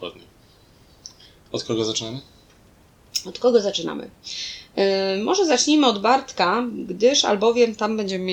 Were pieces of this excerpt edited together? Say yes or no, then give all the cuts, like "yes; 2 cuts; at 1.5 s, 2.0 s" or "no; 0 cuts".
no; 0 cuts